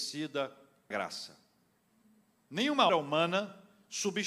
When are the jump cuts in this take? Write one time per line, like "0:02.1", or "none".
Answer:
0:00.9
0:02.9